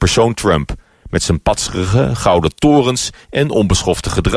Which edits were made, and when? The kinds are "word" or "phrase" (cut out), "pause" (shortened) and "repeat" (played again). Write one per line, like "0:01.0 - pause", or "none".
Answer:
none